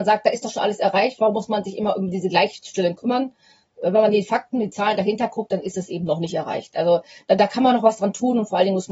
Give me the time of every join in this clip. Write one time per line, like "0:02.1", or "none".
none

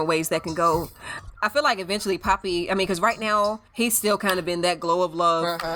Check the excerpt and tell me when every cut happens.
0:03.7

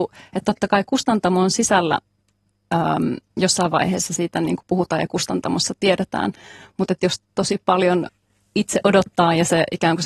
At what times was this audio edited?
none

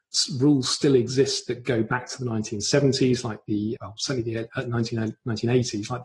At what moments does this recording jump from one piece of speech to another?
0:03.8

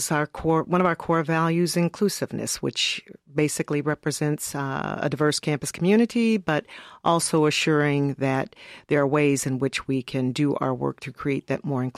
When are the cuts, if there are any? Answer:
none

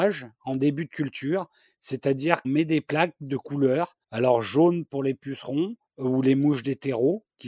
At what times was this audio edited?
0:02.4
0:04.0
0:05.9

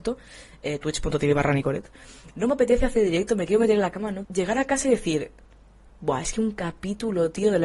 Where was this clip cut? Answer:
0:04.2

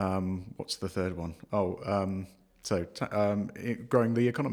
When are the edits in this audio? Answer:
none

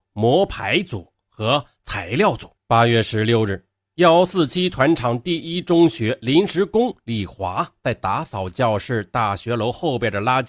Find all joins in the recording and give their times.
0:02.6

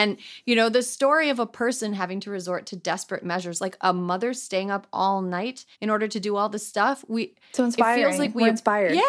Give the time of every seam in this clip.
0:05.7

